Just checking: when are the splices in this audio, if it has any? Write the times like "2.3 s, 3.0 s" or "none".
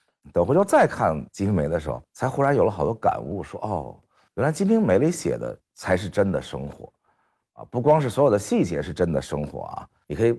none